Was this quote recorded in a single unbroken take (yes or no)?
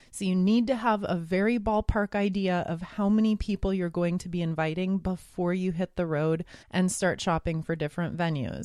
no